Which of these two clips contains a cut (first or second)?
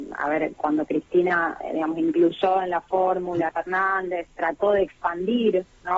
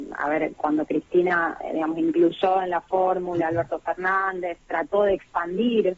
first